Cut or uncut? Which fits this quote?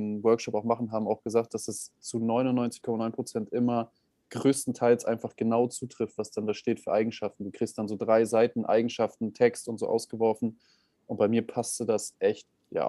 uncut